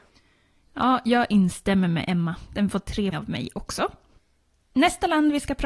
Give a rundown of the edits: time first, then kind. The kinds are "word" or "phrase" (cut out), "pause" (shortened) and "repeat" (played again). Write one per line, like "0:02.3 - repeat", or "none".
0:03.1 - word